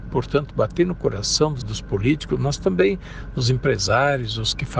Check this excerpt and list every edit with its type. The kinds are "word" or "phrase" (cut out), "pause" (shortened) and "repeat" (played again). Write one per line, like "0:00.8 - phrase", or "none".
0:01.6 - word